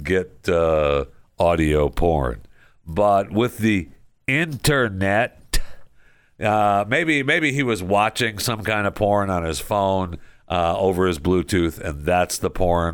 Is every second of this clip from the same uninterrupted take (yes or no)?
yes